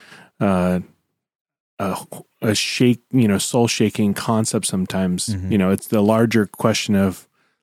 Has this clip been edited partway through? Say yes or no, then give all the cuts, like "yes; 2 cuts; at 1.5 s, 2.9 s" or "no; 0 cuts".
no; 0 cuts